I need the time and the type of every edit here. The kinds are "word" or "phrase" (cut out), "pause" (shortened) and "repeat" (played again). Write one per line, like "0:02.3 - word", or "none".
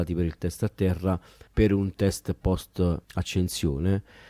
0:01.5 - pause
0:03.0 - pause

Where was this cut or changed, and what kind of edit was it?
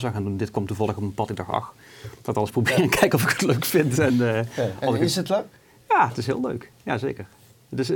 none

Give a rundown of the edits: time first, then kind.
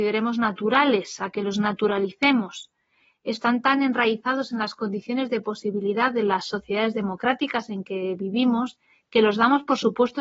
none

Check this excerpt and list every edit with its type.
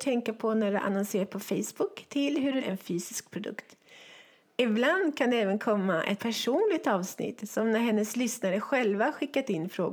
0:02.6 - word
0:06.2 - word

